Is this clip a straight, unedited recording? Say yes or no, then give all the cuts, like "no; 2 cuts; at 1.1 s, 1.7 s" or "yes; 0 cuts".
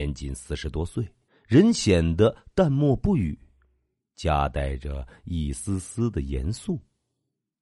no; 1 cut; at 1.3 s